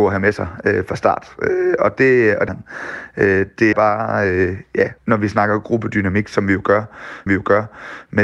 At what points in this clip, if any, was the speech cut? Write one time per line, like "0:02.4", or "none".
0:02.5
0:03.7
0:05.0
0:07.3